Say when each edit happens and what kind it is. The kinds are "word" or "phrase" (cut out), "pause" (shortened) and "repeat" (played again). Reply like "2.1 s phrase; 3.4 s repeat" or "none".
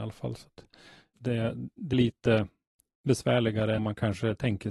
1.2 s word; 1.9 s word; 3.8 s phrase